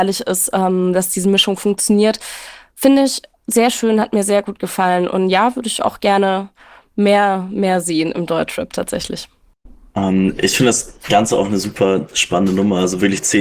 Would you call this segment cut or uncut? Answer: uncut